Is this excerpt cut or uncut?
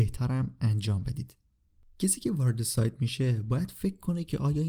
uncut